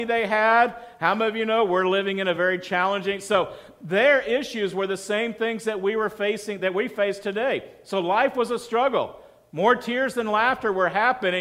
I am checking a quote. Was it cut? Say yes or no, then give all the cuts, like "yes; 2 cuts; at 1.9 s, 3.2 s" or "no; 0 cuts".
no; 0 cuts